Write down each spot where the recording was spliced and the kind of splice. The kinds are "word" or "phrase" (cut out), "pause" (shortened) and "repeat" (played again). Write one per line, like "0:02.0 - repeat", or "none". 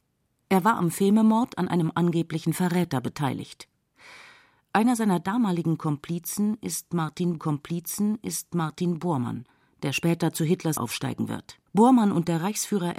0:07.4 - repeat
0:10.8 - word
0:11.7 - pause